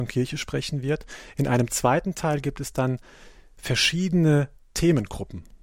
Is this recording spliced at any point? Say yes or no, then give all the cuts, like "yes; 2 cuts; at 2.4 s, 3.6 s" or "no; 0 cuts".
no; 0 cuts